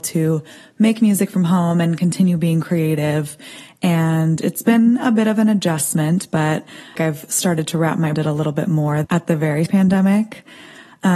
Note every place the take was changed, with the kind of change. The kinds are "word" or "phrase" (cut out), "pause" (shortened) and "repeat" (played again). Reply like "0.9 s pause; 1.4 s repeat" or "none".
7.0 s phrase; 8.2 s phrase; 9.0 s word; 9.7 s phrase